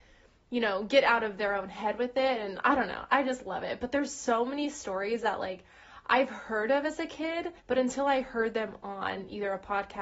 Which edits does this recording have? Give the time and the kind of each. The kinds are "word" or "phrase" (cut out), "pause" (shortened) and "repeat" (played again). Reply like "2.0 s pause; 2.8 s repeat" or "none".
7.6 s pause